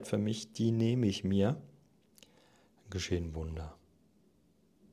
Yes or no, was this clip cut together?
no